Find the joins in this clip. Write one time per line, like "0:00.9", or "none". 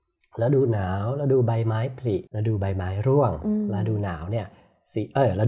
0:02.3